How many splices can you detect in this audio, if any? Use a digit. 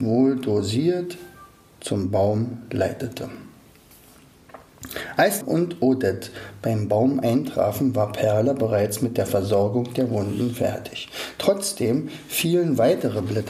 1